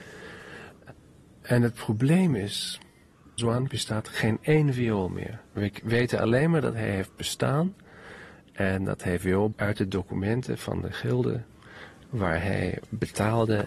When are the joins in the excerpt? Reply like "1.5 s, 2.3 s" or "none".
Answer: 3.4 s, 3.7 s, 5.5 s, 9.5 s